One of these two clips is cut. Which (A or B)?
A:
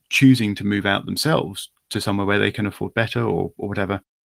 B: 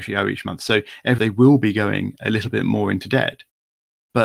B